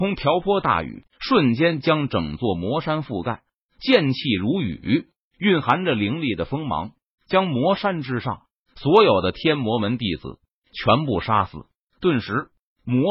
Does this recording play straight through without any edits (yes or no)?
no